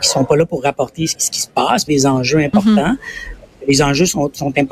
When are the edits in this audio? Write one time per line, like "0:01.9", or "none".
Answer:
0:01.1
0:01.9